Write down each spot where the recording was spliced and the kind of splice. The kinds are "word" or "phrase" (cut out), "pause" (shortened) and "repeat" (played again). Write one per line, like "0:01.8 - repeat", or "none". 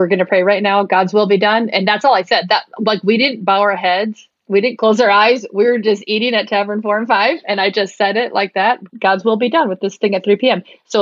0:08.9 - pause